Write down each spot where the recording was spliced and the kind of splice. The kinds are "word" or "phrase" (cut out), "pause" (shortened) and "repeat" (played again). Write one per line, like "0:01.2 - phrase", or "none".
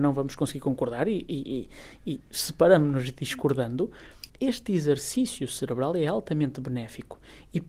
0:04.3 - pause